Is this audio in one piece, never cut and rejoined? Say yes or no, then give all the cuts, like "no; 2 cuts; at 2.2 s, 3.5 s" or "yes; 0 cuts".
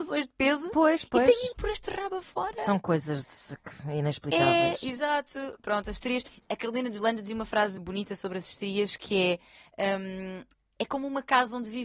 no; 3 cuts; at 1.5 s, 7.8 s, 10.6 s